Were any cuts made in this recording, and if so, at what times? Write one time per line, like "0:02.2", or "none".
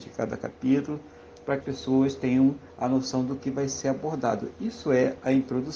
0:01.6